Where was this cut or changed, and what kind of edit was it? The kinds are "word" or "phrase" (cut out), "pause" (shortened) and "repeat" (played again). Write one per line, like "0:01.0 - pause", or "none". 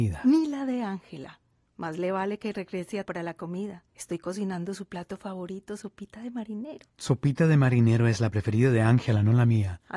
0:01.5 - pause
0:03.0 - word
0:03.9 - pause